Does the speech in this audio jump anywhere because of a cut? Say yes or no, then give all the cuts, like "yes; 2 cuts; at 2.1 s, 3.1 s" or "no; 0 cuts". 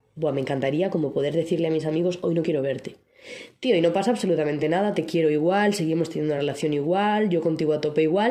no; 0 cuts